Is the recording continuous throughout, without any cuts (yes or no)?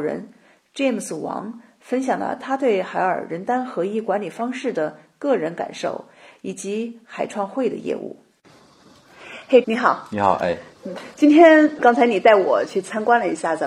no